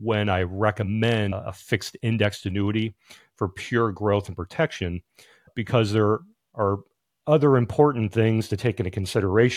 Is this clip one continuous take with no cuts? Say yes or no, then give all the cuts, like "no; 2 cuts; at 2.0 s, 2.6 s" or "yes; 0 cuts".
yes; 0 cuts